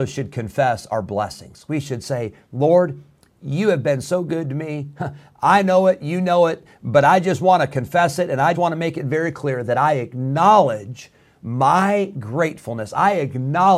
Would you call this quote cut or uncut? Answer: cut